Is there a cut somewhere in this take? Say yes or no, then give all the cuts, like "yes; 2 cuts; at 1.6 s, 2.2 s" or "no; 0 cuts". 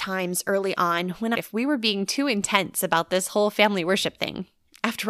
yes; 1 cut; at 1.3 s